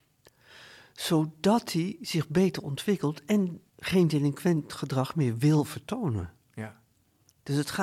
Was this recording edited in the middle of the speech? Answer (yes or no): yes